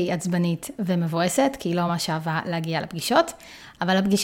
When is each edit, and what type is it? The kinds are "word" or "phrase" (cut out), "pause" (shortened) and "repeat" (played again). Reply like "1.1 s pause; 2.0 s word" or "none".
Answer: none